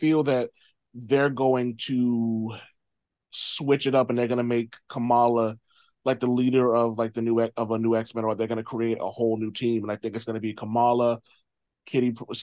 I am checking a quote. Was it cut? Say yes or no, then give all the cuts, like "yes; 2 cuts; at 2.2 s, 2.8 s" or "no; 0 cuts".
no; 0 cuts